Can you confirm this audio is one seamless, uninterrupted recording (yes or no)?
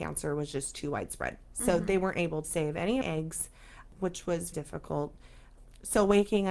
no